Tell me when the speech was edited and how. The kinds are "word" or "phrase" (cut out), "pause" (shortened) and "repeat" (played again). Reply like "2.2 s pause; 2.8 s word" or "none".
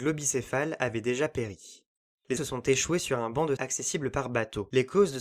2.4 s word; 3.6 s word